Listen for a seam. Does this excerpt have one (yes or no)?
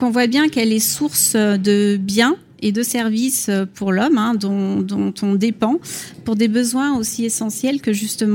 no